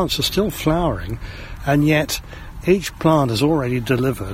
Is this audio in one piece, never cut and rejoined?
yes; 0 cuts

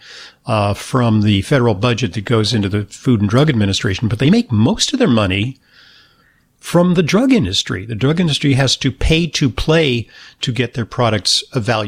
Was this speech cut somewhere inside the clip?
no; 0 cuts

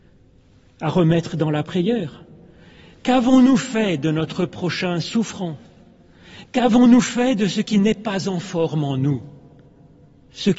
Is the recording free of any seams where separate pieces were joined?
yes; 0 cuts

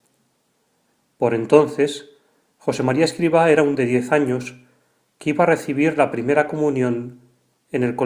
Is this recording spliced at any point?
yes; 1 cut; at 3.7 s

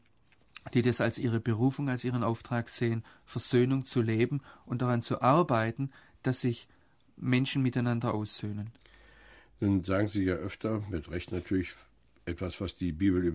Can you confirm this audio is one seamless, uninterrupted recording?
yes; 0 cuts

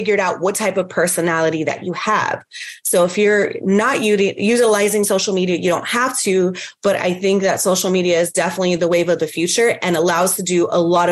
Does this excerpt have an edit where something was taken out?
no; 0 cuts

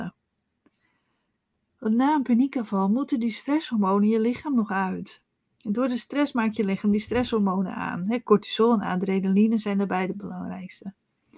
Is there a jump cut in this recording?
no; 0 cuts

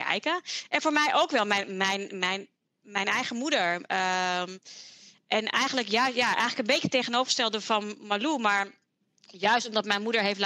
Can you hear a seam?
no; 0 cuts

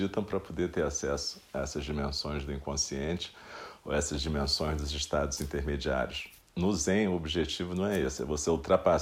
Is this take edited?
no; 0 cuts

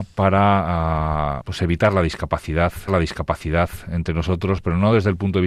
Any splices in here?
yes; 2 cuts; at 1.4 s, 2.9 s

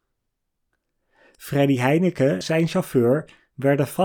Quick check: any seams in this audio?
yes; 1 cut; at 2.4 s

